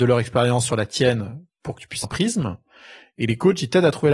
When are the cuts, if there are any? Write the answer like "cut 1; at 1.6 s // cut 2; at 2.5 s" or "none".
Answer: cut 1; at 2.0 s